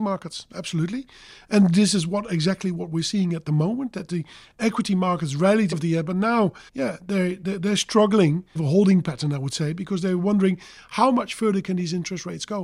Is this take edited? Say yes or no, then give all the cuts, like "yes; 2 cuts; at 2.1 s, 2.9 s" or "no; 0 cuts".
yes; 3 cuts; at 5.7 s, 6.7 s, 8.6 s